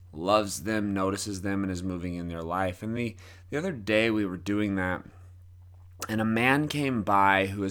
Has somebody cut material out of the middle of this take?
no; 0 cuts

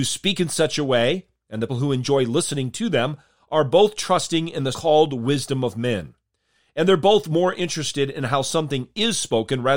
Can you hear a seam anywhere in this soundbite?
yes; 2 cuts; at 1.7 s, 4.7 s

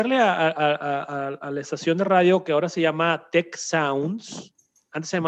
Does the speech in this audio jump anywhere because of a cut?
no; 0 cuts

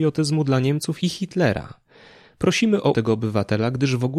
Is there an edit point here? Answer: yes; 1 cut; at 2.9 s

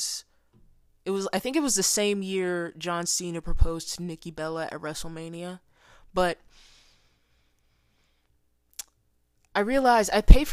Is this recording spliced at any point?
no; 0 cuts

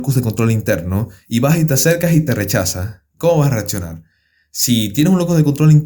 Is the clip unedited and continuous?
yes; 0 cuts

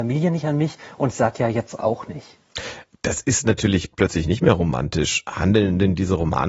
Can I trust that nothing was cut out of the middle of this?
yes; 0 cuts

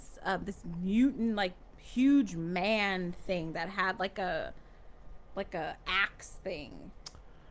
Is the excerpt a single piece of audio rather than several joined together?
yes; 0 cuts

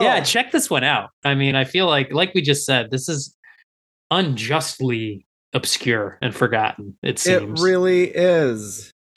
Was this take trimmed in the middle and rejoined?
no; 0 cuts

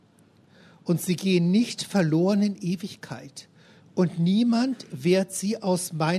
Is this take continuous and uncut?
yes; 0 cuts

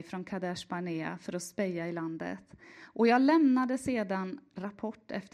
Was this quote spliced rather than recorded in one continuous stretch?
no; 0 cuts

